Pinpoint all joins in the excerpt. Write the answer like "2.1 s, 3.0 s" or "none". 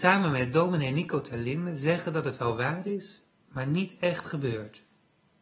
none